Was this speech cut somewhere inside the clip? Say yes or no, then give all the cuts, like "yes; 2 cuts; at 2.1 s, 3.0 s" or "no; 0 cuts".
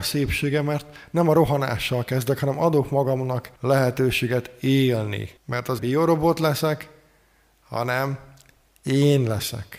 yes; 3 cuts; at 3.6 s, 5.4 s, 5.8 s